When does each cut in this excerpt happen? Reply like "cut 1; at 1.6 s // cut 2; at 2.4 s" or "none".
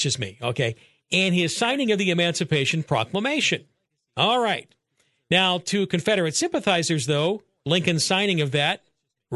none